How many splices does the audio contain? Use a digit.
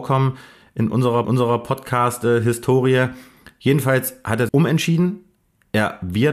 2